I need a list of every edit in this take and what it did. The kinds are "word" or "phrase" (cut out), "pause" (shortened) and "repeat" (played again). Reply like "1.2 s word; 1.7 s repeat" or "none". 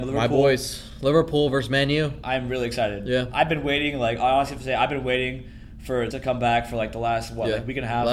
6.1 s word